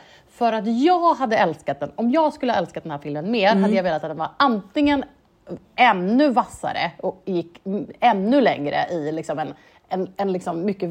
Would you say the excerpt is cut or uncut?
uncut